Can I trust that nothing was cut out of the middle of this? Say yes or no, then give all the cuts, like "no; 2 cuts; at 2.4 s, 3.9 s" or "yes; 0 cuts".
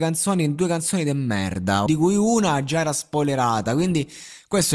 no; 1 cut; at 1.9 s